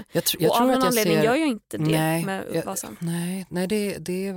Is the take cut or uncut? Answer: uncut